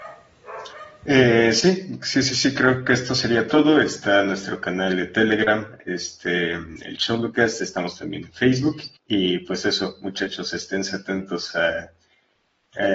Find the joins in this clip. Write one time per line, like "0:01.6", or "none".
0:09.0

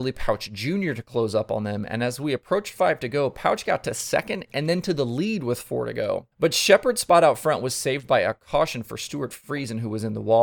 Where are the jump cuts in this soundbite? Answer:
0:06.3

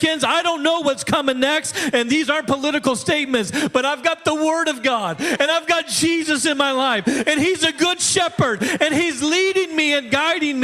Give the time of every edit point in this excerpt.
none

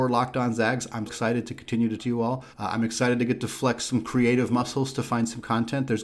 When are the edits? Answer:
0:01.1
0:02.0
0:02.5

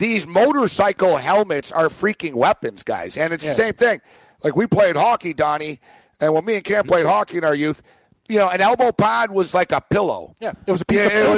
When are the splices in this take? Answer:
none

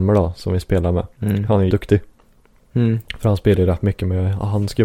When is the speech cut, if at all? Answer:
0:01.1
0:01.7

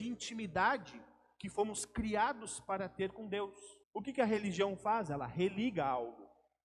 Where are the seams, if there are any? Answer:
0:03.8

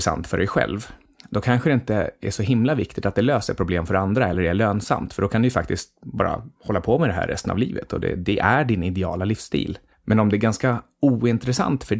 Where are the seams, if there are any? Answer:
none

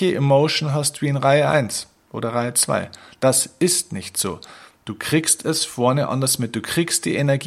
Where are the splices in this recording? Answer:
none

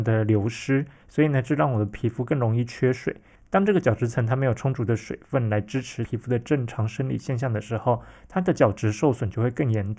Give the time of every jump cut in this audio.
none

